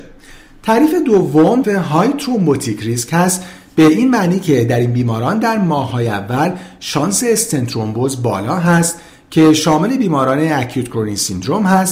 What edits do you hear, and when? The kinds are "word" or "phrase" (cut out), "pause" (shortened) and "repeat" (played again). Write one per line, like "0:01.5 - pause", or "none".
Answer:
0:01.6 - word